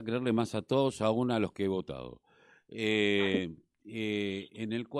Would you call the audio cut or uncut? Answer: uncut